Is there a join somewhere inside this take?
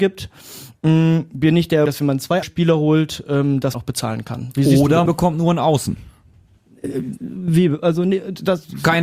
yes; 4 cuts; at 1.9 s, 2.4 s, 3.7 s, 5.1 s

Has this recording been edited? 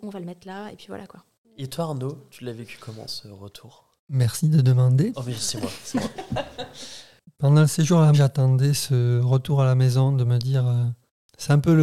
yes; 1 cut; at 8.1 s

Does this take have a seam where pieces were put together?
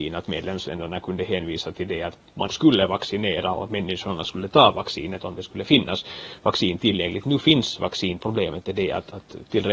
yes; 2 cuts; at 2.5 s, 8.2 s

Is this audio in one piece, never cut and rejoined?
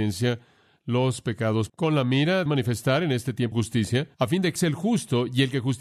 no; 5 cuts; at 1.7 s, 2.5 s, 3.5 s, 4.1 s, 4.6 s

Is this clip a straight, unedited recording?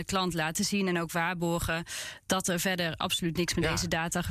yes; 0 cuts

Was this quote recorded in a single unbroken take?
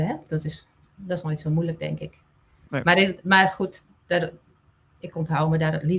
yes; 0 cuts

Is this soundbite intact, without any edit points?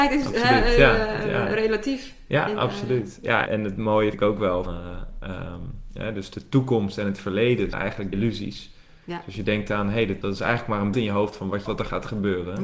no; 8 cuts; at 3.5 s, 4.1 s, 4.7 s, 7.7 s, 8.1 s, 10.2 s, 10.9 s, 11.7 s

